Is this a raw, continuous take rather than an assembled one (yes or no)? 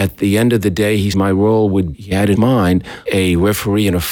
no